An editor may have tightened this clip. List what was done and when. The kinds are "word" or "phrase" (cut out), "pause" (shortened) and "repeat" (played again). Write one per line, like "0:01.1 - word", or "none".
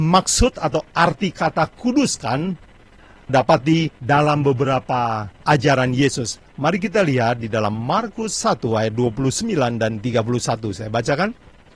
0:03.3 - word
0:04.0 - pause
0:05.4 - pause